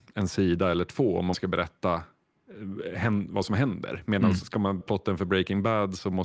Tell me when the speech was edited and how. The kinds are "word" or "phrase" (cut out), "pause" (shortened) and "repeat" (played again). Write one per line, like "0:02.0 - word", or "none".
0:01.3 - word
0:04.8 - word